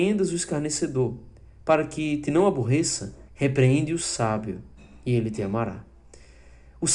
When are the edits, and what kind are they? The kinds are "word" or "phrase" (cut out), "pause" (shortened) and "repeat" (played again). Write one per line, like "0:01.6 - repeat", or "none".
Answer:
0:03.3 - pause